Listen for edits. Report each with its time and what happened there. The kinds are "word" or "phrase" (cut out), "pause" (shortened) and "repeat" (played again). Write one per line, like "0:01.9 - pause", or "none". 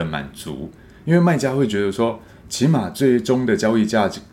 none